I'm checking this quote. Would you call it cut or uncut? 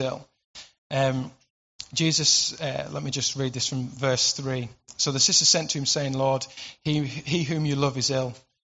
uncut